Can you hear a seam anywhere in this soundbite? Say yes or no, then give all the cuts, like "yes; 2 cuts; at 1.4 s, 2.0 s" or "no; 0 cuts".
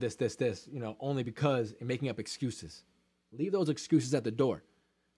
no; 0 cuts